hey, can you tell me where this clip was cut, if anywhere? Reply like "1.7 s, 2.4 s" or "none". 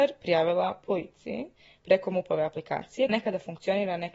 3.1 s